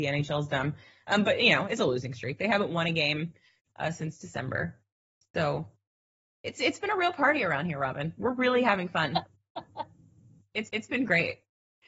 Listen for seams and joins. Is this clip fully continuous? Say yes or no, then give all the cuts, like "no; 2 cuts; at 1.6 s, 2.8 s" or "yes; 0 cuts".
no; 1 cut; at 10.7 s